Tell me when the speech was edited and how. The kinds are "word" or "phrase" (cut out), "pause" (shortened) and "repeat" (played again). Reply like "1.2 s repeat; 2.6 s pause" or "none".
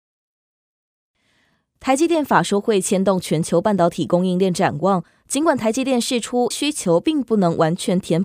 6.5 s word